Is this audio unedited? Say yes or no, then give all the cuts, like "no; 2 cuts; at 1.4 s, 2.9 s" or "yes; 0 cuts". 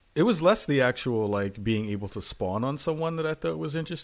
yes; 0 cuts